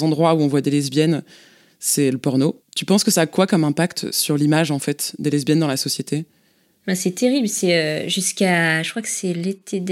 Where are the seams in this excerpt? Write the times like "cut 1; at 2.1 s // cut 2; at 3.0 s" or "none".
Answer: none